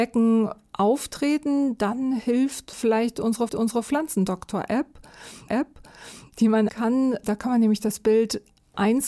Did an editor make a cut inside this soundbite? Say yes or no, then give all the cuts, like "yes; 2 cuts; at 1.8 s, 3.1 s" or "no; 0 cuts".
yes; 4 cuts; at 2.7 s, 3.5 s, 5.5 s, 6.7 s